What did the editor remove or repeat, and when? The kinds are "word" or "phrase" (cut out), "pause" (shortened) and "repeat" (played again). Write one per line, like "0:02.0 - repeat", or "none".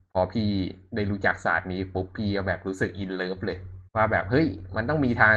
0:03.9 - pause